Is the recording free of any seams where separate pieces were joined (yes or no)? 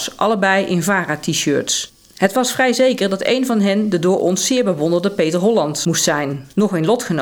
yes